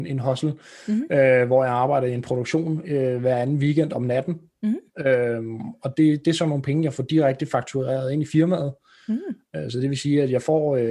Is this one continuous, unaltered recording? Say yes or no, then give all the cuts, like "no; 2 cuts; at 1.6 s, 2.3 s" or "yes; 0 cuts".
yes; 0 cuts